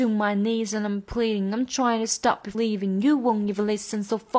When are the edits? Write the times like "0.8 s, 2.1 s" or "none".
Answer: 2.5 s